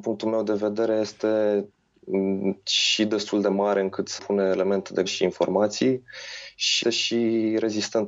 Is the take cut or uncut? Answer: cut